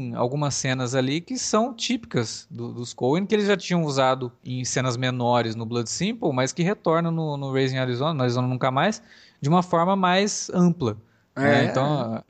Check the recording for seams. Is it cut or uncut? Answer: uncut